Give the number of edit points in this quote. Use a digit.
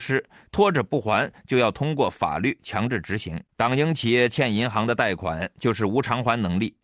1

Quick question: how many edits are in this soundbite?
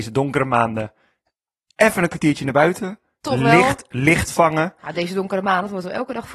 0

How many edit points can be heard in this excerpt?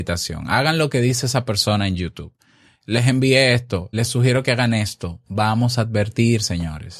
1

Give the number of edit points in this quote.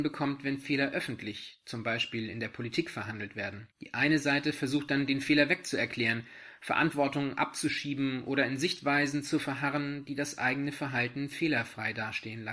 1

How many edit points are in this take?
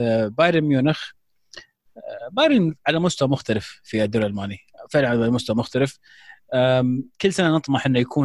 0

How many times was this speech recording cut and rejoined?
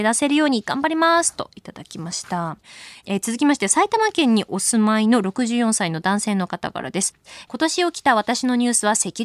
0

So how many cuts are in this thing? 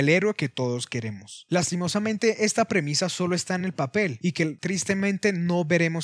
0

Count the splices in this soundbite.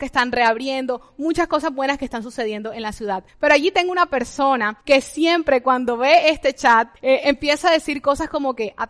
3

